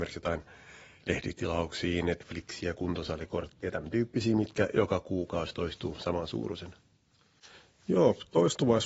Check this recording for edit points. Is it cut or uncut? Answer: uncut